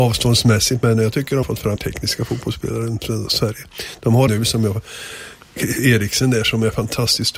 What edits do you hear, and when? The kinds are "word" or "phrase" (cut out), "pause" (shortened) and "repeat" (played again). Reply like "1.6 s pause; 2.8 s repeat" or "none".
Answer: 1.4 s word; 1.8 s word; 4.3 s word